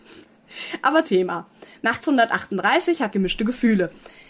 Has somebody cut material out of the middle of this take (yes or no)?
yes